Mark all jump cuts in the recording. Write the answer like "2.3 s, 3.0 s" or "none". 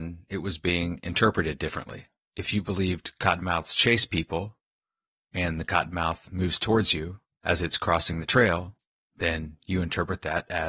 2.2 s